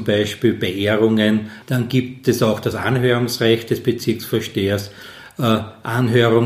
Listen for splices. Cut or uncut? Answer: uncut